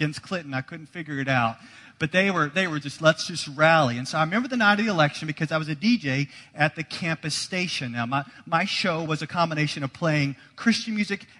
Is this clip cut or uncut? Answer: uncut